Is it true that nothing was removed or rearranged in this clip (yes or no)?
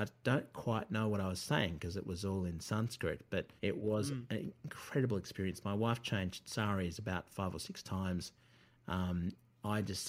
no